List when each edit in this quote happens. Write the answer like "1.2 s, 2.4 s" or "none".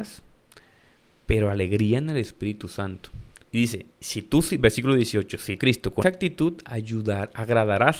3.4 s, 3.9 s, 5.6 s, 6.0 s